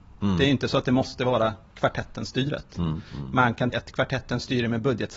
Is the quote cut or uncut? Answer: cut